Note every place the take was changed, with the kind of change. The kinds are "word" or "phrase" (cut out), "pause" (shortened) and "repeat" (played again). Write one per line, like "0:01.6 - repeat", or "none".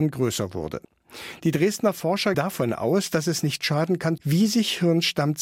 0:02.3 - word
0:04.2 - phrase